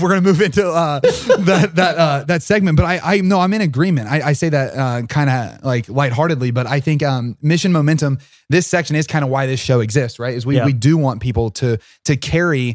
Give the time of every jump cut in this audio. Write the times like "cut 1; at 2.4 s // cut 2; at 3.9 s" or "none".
none